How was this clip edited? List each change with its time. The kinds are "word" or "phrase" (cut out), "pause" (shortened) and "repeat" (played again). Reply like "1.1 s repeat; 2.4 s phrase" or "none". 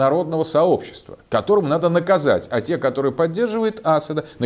1.2 s pause